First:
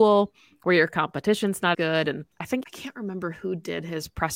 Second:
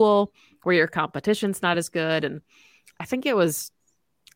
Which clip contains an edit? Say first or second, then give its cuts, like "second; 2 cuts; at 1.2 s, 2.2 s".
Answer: first; 3 cuts; at 1.7 s, 2.3 s, 2.6 s